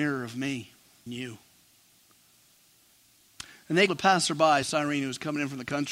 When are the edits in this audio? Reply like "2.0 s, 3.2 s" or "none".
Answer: 1.1 s, 3.9 s, 4.6 s